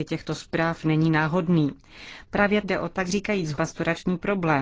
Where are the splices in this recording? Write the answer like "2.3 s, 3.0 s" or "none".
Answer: 2.6 s, 3.5 s